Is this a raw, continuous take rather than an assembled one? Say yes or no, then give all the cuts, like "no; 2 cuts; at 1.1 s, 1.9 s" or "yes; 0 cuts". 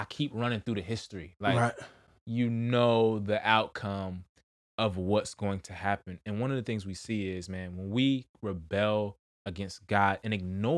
yes; 0 cuts